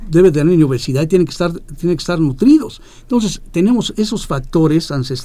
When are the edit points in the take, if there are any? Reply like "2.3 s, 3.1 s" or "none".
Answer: none